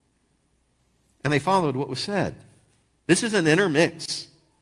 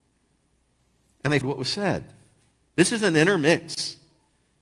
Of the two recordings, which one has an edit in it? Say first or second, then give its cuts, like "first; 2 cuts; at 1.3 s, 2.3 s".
second; 1 cut; at 1.4 s